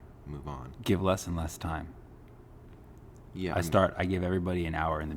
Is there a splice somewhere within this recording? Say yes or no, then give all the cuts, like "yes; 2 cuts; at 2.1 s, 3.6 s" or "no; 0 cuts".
no; 0 cuts